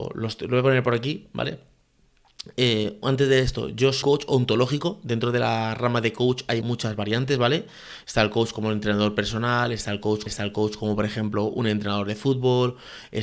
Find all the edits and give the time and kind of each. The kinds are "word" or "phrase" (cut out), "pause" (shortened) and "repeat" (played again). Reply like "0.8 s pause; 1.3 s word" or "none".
4.0 s word; 6.6 s word; 10.3 s repeat